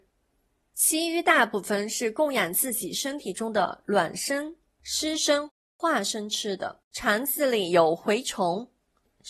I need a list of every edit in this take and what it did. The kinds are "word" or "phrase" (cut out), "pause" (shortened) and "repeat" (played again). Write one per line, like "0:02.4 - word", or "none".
0:06.8 - pause